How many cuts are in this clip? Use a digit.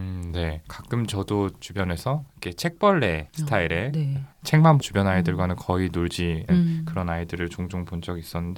2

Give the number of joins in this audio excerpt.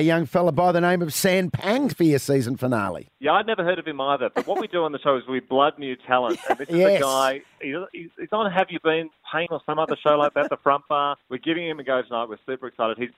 4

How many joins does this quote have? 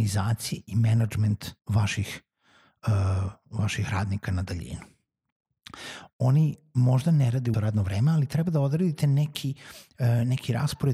2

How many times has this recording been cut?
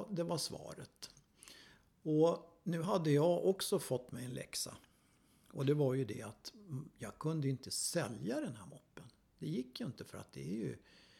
0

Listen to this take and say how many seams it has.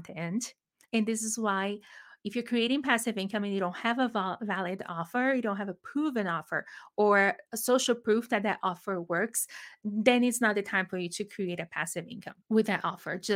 1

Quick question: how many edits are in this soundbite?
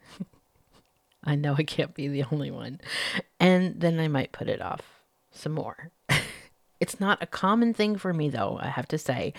0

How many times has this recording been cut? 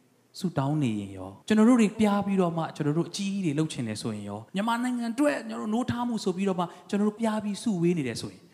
4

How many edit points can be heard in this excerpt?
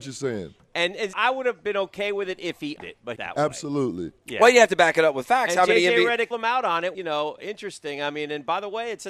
5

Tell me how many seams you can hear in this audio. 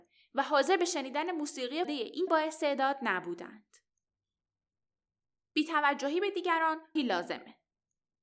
3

